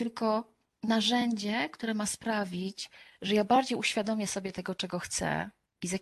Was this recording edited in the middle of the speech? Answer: no; 0 cuts

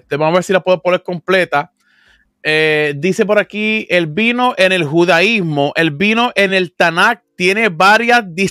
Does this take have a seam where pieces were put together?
no; 0 cuts

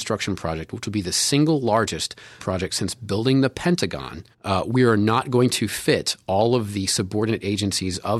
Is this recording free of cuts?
no; 2 cuts; at 2.4 s, 4.3 s

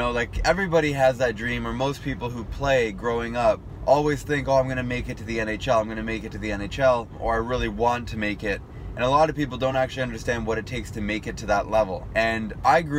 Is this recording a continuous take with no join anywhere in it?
yes; 0 cuts

